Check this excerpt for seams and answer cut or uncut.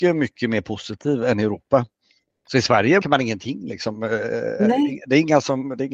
cut